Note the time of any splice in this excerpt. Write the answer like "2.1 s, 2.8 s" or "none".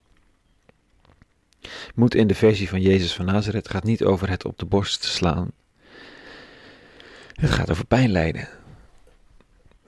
none